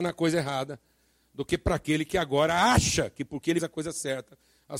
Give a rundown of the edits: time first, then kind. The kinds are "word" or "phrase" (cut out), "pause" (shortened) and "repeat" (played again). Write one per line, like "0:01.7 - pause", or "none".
0:03.6 - word